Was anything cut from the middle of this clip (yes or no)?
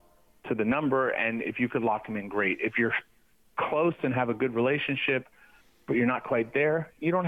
no